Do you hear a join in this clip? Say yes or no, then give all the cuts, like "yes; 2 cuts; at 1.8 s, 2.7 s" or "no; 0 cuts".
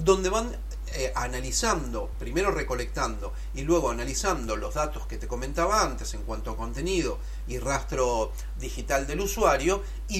no; 0 cuts